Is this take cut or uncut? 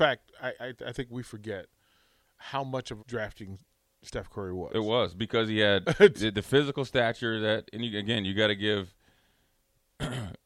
cut